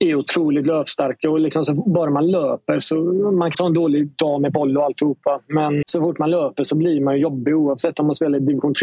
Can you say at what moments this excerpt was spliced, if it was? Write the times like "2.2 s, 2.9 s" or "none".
3.5 s, 5.8 s

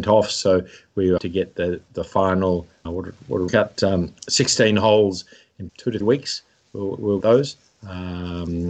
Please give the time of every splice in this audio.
1.2 s, 2.8 s, 3.5 s, 5.7 s, 6.0 s, 7.2 s

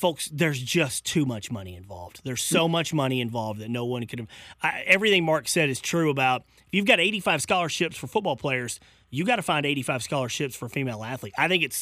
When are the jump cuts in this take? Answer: none

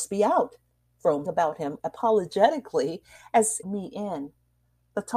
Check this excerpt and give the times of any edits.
1.3 s, 1.8 s, 3.6 s

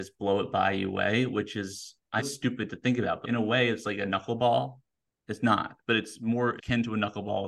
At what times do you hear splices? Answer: 2.2 s, 3.2 s, 6.6 s

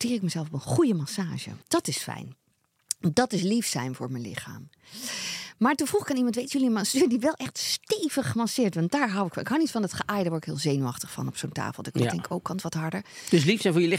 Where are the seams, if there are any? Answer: 1.6 s

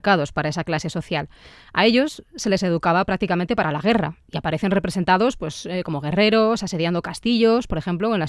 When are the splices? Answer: none

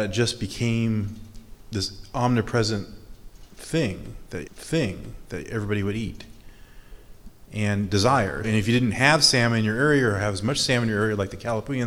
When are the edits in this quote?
4.5 s, 8.4 s

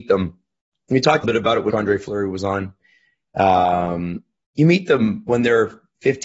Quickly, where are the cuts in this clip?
1.2 s, 1.7 s

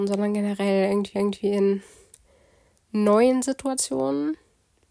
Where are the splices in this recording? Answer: 1.2 s

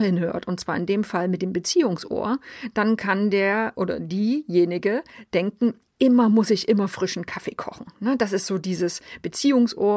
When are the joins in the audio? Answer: none

